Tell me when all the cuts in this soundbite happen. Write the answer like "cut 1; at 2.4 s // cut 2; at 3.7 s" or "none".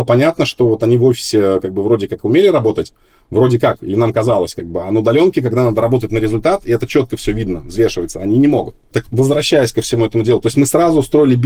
cut 1; at 9.0 s